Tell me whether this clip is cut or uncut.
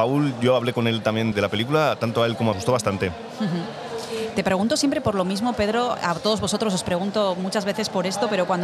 cut